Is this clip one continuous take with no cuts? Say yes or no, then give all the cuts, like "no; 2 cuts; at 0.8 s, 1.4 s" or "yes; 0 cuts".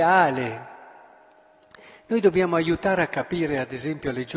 yes; 0 cuts